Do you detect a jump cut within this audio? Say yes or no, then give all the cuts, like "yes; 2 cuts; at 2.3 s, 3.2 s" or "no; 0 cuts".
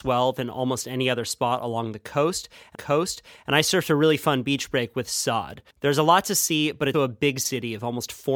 yes; 3 cuts; at 2.7 s, 5.7 s, 6.9 s